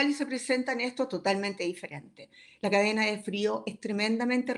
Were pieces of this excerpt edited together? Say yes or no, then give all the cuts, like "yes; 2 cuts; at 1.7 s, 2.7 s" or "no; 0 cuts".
no; 0 cuts